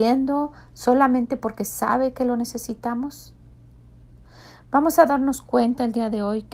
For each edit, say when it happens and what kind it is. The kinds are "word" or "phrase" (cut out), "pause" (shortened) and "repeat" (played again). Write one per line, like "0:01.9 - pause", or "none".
none